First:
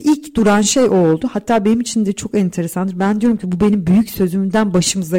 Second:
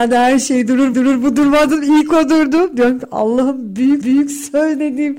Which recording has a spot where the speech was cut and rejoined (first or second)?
second